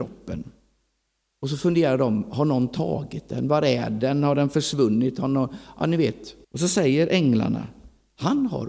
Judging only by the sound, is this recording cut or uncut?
cut